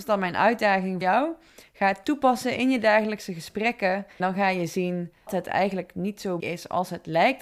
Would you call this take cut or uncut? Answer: cut